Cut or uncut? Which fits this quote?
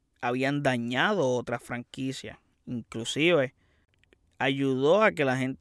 uncut